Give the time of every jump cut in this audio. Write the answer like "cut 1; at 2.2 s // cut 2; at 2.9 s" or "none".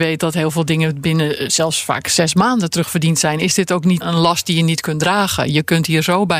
cut 1; at 4.0 s